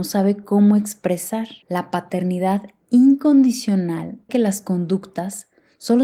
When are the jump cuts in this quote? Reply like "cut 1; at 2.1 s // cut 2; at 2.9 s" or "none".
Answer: cut 1; at 1.6 s // cut 2; at 4.3 s